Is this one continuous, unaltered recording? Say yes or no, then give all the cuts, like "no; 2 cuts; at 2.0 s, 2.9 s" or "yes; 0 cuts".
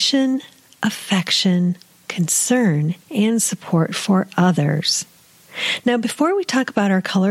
no; 1 cut; at 3.0 s